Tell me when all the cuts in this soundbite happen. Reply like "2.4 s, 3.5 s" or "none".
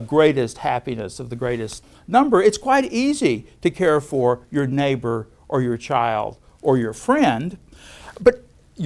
none